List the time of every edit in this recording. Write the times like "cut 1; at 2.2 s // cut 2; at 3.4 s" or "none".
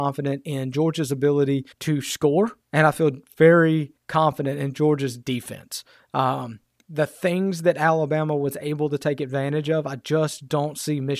cut 1; at 1.7 s // cut 2; at 2.6 s // cut 3; at 4.0 s